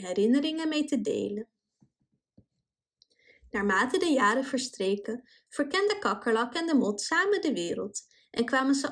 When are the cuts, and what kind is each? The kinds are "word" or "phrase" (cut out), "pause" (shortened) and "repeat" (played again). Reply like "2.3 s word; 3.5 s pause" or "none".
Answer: none